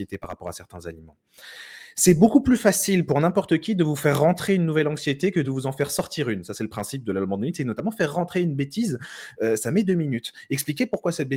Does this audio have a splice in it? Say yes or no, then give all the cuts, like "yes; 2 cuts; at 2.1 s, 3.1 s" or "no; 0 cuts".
no; 0 cuts